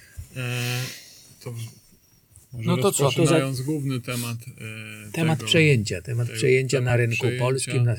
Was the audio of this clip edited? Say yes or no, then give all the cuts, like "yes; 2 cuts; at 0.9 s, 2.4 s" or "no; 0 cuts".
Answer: no; 0 cuts